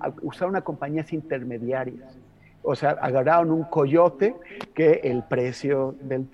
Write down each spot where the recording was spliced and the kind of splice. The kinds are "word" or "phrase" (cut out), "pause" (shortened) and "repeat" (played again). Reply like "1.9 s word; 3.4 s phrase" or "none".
5.0 s word